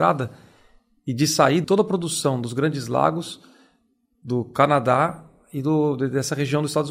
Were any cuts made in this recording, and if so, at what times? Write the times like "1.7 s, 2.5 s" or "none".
1.6 s